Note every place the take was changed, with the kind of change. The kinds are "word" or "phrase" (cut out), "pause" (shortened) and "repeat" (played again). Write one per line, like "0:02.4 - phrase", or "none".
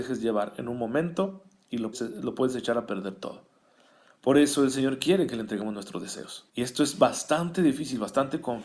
0:01.9 - word
0:06.5 - pause